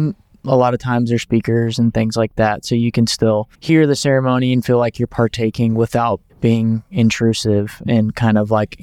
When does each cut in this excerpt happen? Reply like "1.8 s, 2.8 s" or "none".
3.5 s, 6.3 s